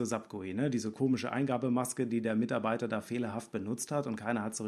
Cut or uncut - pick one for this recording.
uncut